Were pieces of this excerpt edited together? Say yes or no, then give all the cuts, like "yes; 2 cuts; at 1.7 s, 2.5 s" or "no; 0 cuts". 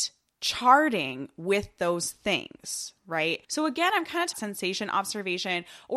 yes; 2 cuts; at 3.4 s, 4.3 s